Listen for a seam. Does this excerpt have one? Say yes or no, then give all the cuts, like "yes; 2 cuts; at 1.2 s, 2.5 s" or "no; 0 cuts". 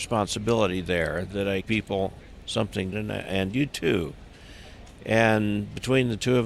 yes; 4 cuts; at 1.3 s, 1.6 s, 2.9 s, 3.7 s